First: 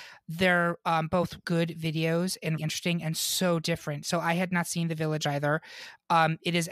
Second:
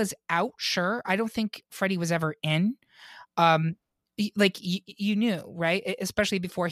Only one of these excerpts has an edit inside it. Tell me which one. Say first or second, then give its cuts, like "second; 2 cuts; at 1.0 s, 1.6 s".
first; 2 cuts; at 1.4 s, 2.6 s